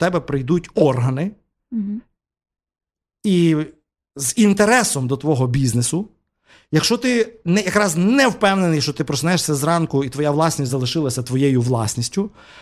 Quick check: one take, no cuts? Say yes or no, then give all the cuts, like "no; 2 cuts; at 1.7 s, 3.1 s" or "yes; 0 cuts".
yes; 0 cuts